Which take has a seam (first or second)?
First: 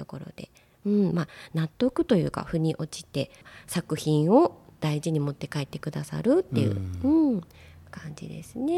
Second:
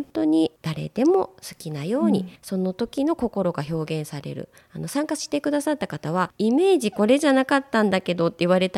second